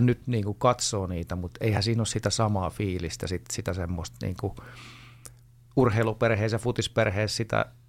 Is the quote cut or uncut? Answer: uncut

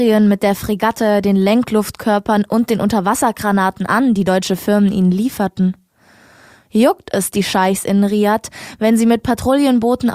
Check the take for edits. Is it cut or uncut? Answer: uncut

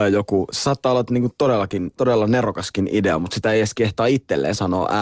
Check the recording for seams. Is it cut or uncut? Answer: cut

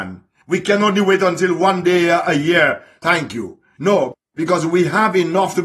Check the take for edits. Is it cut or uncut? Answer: cut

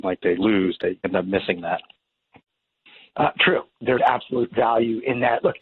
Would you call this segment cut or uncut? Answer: cut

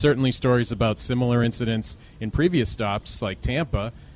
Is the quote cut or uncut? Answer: uncut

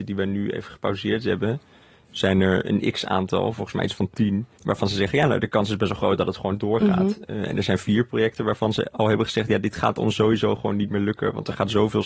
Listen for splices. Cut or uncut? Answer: uncut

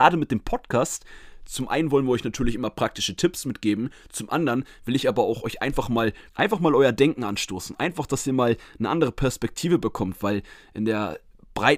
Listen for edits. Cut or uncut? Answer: cut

